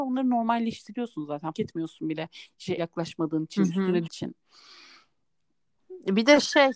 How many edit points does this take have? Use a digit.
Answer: 3